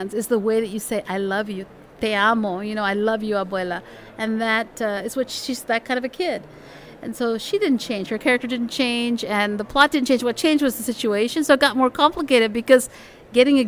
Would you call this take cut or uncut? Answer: uncut